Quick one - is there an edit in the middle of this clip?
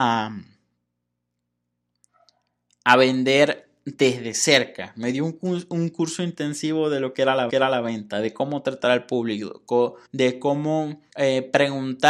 yes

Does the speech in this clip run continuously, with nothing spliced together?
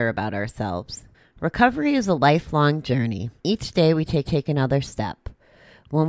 no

